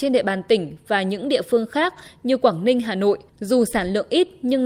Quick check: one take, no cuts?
no; 1 cut; at 3.3 s

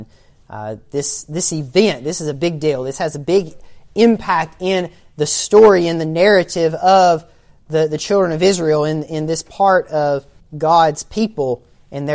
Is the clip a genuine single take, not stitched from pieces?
no; 1 cut; at 10.4 s

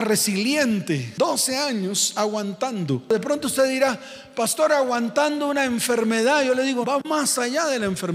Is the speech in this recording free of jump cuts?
no; 1 cut; at 6.8 s

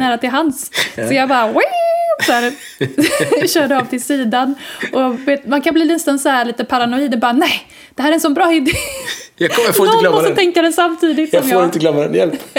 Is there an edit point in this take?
no; 0 cuts

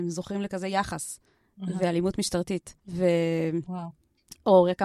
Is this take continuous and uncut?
no; 2 cuts; at 1.3 s, 2.8 s

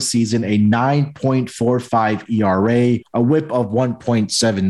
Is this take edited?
yes; 1 cut; at 3.0 s

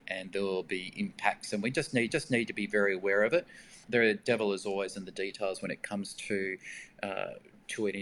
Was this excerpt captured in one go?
no; 2 cuts; at 2.1 s, 3.8 s

